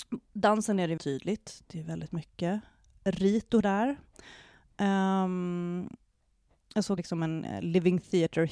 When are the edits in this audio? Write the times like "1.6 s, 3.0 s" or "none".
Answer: 1.0 s, 3.6 s, 7.0 s